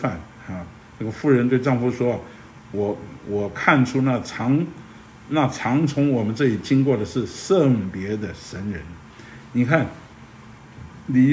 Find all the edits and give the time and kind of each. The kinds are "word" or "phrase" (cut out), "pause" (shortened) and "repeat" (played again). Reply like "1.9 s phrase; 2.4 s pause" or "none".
none